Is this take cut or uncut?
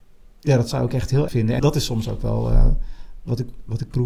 cut